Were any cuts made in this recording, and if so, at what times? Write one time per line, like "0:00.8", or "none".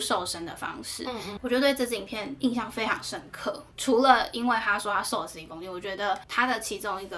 none